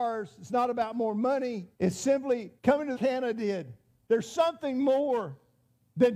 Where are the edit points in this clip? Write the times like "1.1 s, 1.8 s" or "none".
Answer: 1.7 s, 2.6 s, 3.0 s

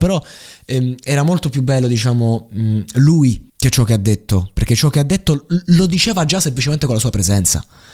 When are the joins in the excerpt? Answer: 3.5 s

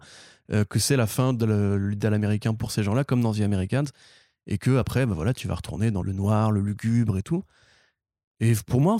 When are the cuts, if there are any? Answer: 6.0 s

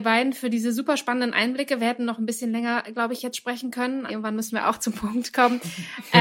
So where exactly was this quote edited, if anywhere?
4.1 s

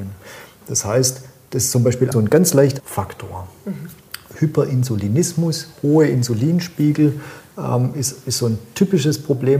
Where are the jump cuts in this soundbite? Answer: 2.1 s, 2.8 s

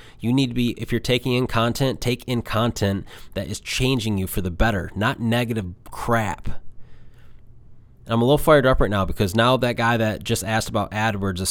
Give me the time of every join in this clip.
none

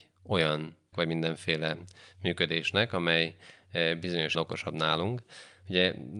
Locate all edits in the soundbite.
0.9 s, 4.3 s

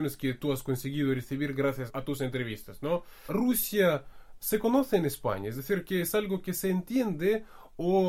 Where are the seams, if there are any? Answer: none

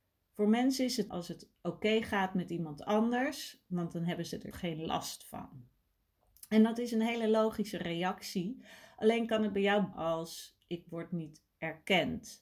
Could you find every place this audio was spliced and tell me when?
1.1 s, 4.5 s, 9.9 s

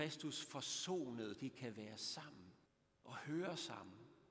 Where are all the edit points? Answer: 1.3 s, 2.7 s

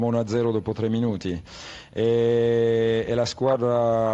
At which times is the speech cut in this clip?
none

